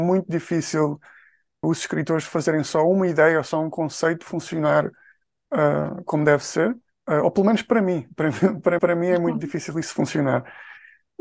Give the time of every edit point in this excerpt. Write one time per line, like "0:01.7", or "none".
0:01.6
0:06.9
0:08.8